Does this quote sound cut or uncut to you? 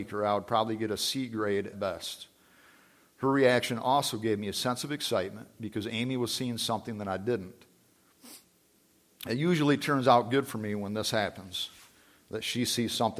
cut